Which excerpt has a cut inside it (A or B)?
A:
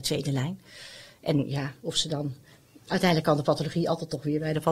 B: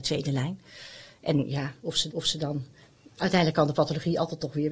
B